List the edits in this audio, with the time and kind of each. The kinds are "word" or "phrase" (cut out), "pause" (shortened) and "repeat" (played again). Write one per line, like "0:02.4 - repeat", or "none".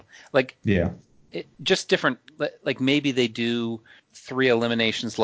none